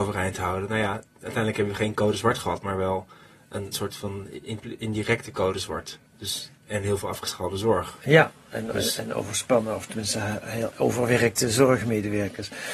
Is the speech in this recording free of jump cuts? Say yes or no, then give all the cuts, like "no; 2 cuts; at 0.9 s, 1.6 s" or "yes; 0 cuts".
no; 1 cut; at 6.1 s